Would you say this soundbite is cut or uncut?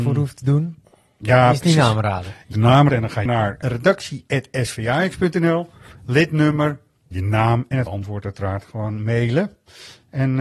cut